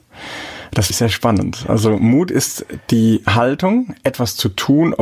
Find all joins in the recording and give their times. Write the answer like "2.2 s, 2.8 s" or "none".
0.9 s